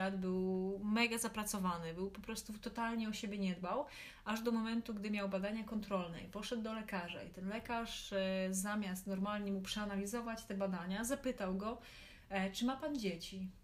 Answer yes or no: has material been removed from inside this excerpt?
no